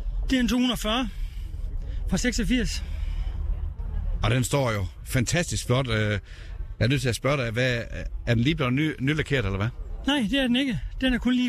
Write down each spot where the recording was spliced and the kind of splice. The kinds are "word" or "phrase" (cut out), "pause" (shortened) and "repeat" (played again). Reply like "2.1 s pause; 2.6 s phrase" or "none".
none